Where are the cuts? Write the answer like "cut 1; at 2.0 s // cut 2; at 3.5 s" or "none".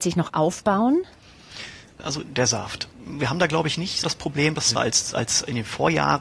cut 1; at 2.2 s // cut 2; at 2.9 s // cut 3; at 4.0 s // cut 4; at 4.8 s